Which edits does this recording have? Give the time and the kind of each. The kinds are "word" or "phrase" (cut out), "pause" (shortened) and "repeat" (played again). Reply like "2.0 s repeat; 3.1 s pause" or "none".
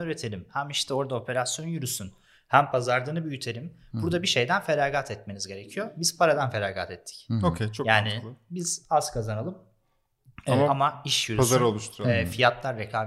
none